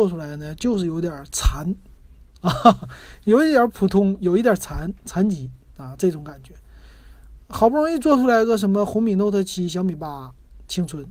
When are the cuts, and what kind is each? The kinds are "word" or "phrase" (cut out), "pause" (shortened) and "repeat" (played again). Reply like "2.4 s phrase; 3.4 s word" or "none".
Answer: none